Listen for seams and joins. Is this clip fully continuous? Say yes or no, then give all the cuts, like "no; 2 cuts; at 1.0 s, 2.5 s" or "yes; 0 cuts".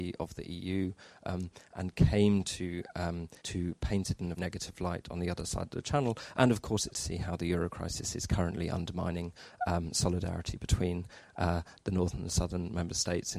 no; 3 cuts; at 3.4 s, 4.4 s, 6.9 s